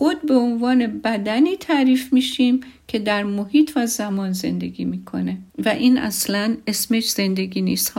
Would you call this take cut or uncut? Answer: cut